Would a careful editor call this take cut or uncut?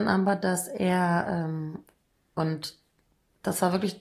uncut